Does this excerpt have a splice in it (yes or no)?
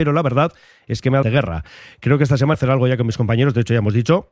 yes